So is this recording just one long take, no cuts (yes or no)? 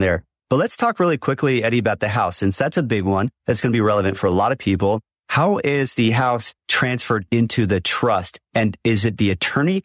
no